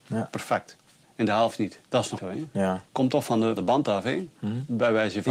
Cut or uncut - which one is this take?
cut